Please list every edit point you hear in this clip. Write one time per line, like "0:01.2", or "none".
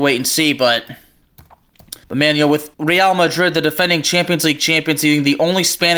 0:02.0
0:02.7